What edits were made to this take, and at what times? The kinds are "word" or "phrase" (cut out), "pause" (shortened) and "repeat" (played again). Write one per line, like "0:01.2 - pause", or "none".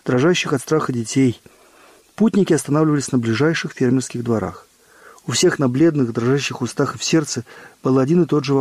none